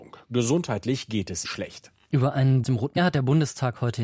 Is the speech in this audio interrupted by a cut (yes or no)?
yes